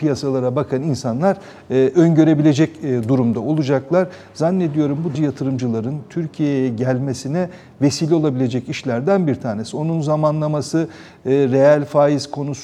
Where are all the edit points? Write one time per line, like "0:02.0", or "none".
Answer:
0:05.1